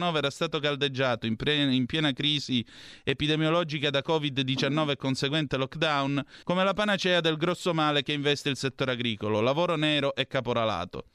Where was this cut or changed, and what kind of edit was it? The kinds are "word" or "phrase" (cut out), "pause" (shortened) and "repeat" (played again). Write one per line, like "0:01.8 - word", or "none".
0:06.4 - pause